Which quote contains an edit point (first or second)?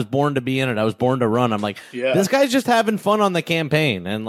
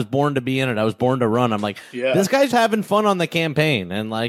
second